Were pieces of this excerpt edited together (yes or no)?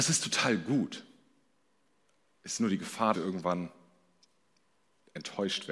yes